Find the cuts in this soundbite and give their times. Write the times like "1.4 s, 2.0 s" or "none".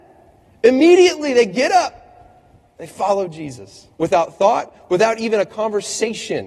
3.9 s